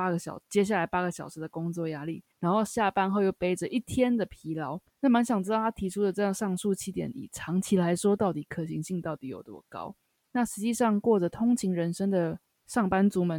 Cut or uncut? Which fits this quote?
cut